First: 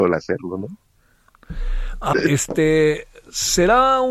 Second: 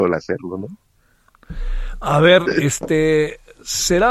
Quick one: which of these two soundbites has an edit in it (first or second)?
first